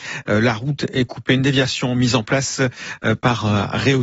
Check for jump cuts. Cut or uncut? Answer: uncut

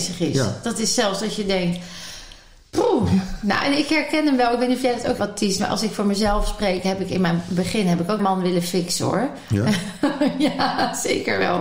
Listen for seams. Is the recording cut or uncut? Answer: cut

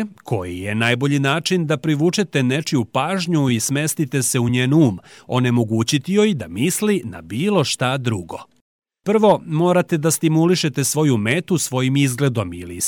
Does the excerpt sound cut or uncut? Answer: uncut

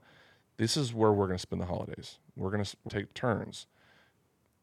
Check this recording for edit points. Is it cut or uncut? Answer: cut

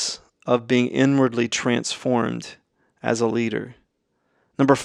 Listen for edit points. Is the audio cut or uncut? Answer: uncut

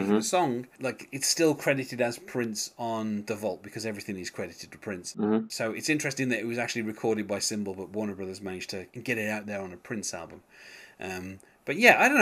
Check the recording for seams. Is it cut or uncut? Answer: cut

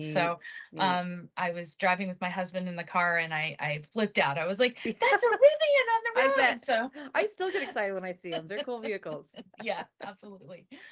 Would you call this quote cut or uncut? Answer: uncut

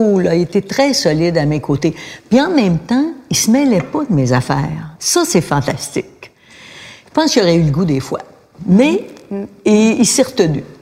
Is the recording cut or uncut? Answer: cut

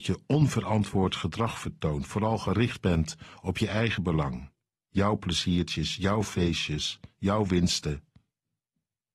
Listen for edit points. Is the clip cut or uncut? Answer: uncut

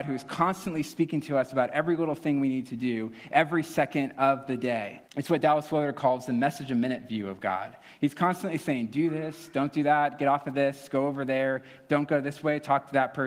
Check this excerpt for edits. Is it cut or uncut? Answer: cut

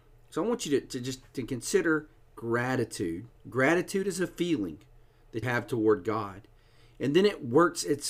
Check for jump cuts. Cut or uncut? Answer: cut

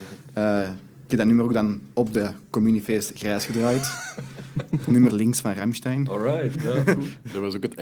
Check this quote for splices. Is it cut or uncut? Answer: cut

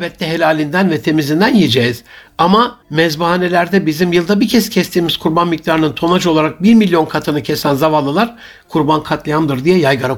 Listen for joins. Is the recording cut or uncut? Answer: cut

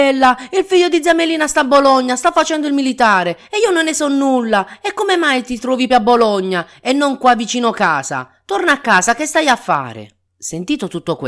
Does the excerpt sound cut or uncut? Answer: cut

